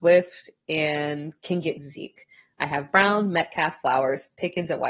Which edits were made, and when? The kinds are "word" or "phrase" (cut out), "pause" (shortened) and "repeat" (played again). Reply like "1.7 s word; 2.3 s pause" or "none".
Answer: none